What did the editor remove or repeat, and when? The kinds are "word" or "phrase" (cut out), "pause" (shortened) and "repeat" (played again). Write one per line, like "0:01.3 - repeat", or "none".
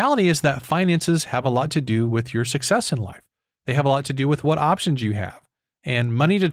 none